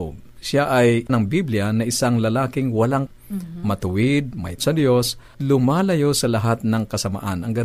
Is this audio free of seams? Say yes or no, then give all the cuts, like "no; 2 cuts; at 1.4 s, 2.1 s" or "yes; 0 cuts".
no; 4 cuts; at 1.1 s, 3.1 s, 4.6 s, 5.3 s